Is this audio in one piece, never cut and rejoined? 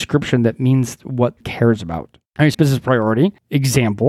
no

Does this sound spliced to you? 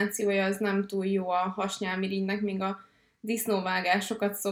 no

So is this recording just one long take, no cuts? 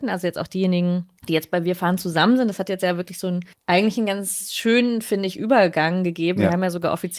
no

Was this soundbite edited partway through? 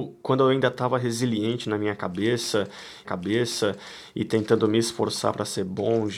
yes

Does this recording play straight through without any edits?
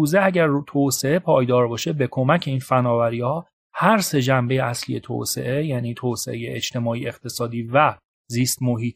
yes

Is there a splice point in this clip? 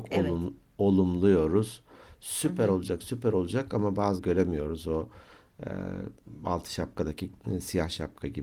yes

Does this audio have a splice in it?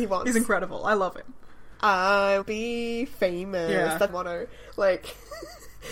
yes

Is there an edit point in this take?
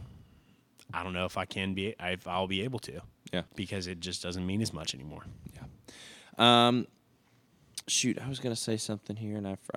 yes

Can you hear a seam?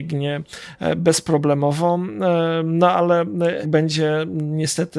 yes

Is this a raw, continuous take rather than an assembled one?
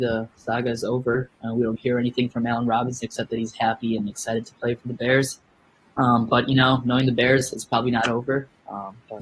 yes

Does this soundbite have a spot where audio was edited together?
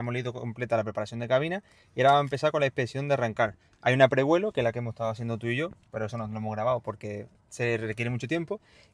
no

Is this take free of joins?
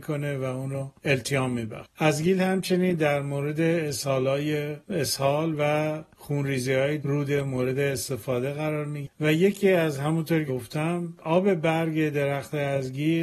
no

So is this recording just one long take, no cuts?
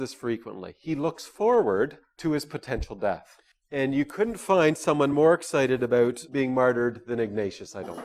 yes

